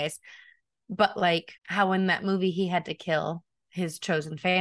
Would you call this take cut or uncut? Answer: cut